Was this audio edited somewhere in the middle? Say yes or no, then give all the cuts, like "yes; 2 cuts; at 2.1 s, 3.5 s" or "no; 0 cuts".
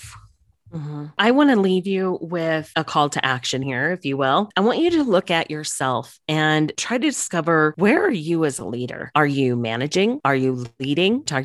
no; 0 cuts